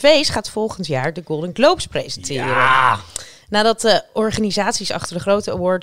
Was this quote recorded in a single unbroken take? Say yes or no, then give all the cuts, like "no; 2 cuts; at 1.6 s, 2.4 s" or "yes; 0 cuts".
yes; 0 cuts